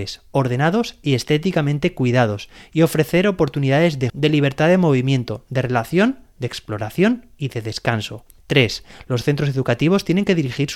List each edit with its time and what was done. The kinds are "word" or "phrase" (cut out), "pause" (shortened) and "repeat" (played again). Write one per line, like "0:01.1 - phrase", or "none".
0:04.1 - word